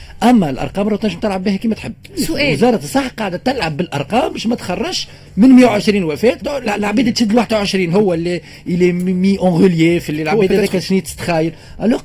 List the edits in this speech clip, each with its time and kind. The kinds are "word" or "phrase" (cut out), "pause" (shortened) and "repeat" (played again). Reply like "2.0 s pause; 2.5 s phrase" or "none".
6.4 s phrase